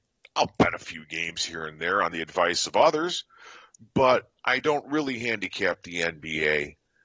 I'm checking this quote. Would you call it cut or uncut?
uncut